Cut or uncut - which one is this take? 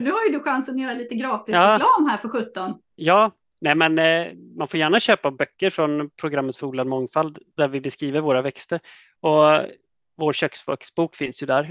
uncut